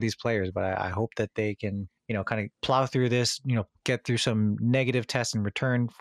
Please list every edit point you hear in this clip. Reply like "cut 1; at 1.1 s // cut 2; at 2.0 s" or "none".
cut 1; at 2.0 s // cut 2; at 2.5 s